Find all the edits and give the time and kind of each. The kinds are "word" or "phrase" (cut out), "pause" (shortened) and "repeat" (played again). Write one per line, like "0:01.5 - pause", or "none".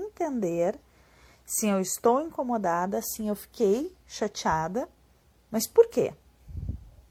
0:05.2 - pause